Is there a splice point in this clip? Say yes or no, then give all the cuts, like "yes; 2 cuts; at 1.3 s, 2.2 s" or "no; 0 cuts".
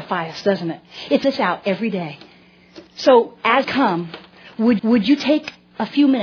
yes; 4 cuts; at 1.2 s, 2.9 s, 3.6 s, 4.8 s